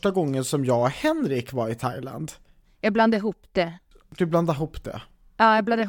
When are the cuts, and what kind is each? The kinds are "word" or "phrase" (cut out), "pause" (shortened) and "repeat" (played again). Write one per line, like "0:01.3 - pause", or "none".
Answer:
none

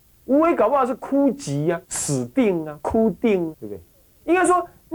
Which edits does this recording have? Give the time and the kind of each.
0:01.8 - pause
0:03.5 - word

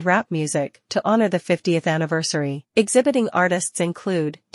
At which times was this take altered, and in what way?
0:02.7 - pause

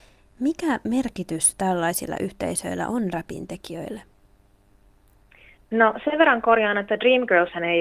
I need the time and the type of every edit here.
none

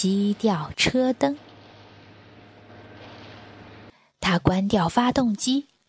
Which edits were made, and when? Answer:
none

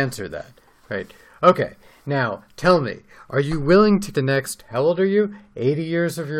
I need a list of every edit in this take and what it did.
0:04.1 - word

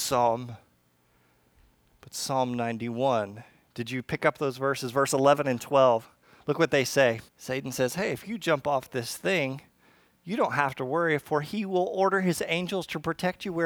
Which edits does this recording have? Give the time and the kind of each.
0:07.3 - pause

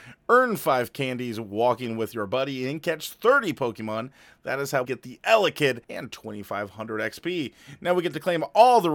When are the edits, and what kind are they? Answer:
0:04.8 - word
0:05.8 - pause

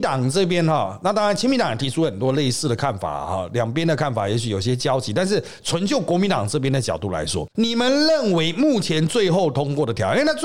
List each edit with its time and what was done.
0:07.5 - pause

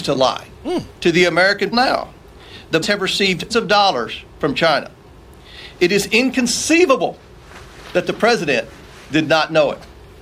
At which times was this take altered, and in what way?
0:01.7 - word
0:02.8 - word
0:03.5 - word

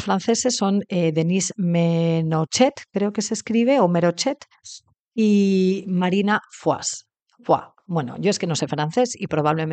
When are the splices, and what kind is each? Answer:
none

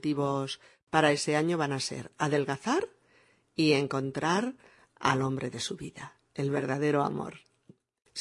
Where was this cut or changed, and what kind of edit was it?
none

